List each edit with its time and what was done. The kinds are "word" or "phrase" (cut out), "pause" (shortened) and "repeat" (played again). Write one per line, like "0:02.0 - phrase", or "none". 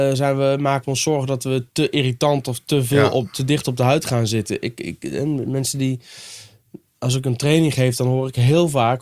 none